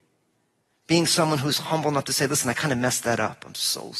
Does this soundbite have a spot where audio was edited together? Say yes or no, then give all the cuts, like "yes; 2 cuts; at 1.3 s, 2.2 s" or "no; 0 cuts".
no; 0 cuts